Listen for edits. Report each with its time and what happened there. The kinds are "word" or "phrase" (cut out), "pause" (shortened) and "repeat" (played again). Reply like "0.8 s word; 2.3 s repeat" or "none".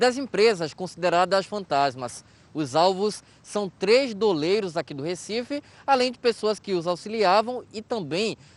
none